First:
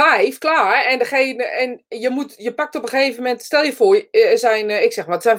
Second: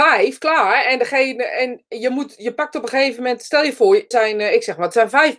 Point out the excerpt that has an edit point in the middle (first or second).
second